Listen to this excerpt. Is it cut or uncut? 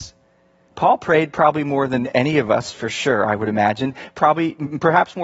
uncut